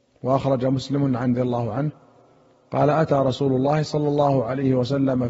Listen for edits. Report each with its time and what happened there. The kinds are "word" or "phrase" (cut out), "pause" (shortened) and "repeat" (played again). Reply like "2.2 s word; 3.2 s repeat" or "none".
1.3 s phrase